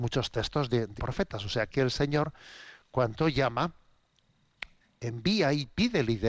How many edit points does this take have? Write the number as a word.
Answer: two